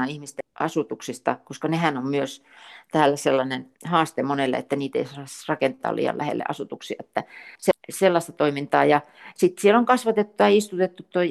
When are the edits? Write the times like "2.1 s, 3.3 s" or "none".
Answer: 3.7 s, 7.6 s